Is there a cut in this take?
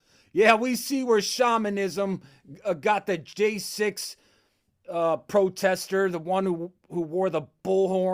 no; 0 cuts

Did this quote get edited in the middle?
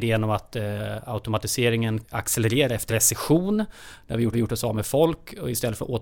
yes; 3 cuts; at 2.0 s, 2.9 s, 4.3 s

